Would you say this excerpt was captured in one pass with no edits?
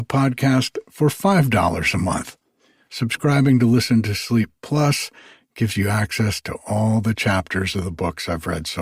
yes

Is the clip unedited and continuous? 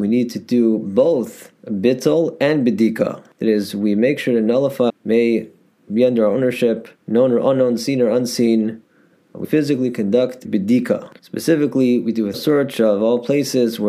no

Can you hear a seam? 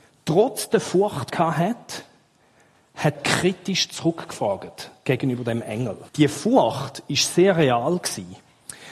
yes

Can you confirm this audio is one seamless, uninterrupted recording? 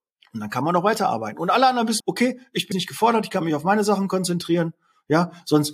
no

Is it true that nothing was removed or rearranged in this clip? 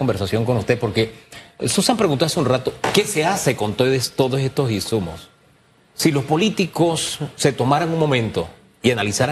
yes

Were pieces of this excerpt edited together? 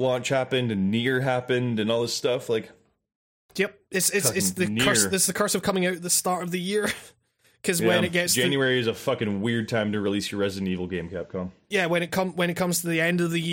no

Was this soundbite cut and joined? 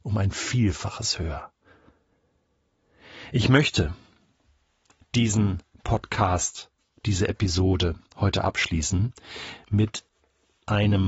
no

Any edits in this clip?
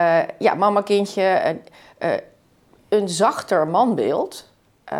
no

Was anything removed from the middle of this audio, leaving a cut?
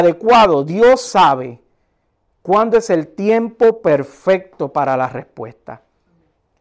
no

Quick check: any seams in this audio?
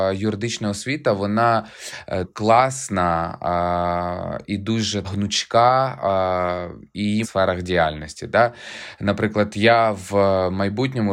yes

